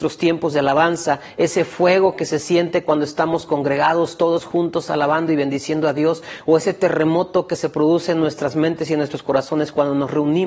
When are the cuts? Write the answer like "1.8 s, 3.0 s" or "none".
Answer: none